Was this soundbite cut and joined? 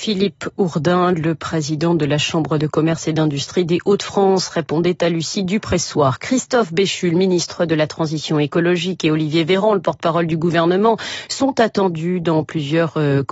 no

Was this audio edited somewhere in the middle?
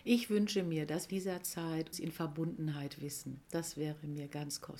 yes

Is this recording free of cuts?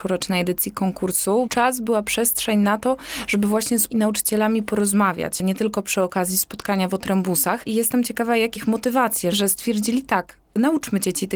no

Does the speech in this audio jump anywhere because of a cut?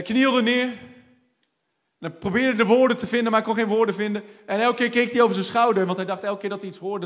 no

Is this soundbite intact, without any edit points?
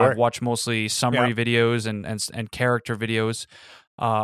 yes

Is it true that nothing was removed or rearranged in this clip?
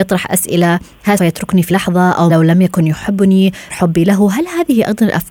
no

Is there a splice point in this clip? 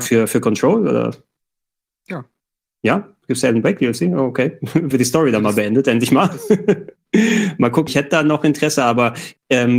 yes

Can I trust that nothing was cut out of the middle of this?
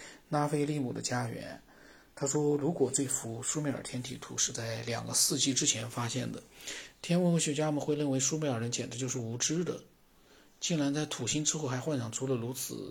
yes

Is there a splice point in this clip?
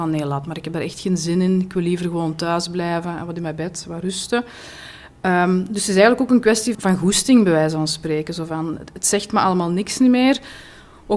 yes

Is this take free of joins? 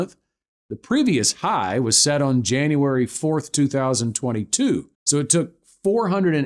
no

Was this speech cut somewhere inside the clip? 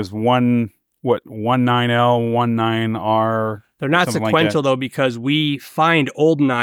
no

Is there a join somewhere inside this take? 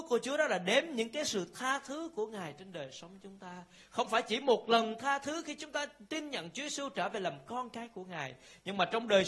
no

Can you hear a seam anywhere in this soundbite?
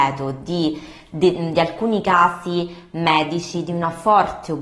no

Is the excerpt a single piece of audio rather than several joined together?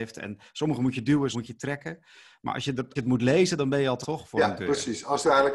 no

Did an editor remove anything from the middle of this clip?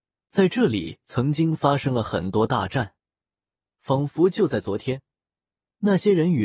no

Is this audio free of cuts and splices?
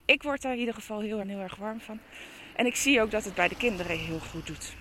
no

